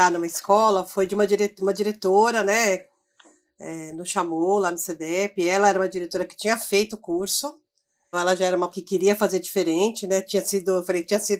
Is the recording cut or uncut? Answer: cut